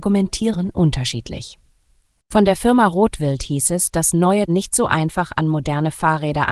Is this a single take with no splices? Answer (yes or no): no